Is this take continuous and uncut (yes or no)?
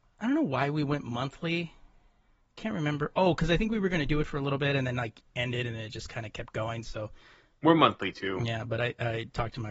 yes